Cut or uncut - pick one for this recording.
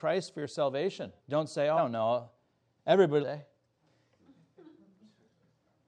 cut